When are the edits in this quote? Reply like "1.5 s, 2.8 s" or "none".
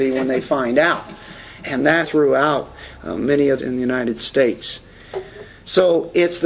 2.0 s, 3.6 s